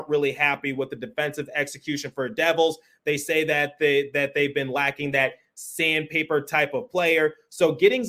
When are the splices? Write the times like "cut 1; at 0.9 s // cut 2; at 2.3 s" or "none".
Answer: none

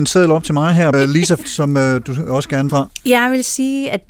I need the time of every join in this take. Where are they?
cut 1; at 0.9 s // cut 2; at 1.4 s // cut 3; at 2.7 s

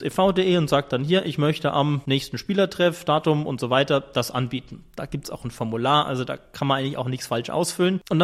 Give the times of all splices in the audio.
none

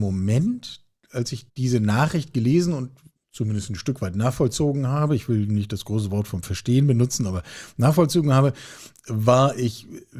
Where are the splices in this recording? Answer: cut 1; at 1.5 s // cut 2; at 3.2 s

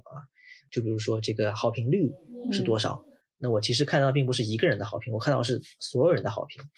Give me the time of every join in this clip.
none

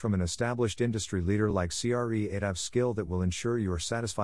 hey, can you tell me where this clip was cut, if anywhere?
none

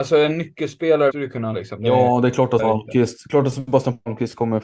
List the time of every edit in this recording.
cut 1; at 1.1 s // cut 2; at 1.5 s // cut 3; at 2.6 s

